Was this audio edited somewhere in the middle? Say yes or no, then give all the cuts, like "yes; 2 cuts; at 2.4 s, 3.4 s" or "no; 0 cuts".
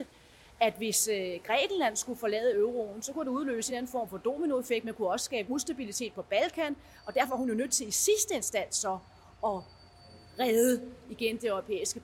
no; 0 cuts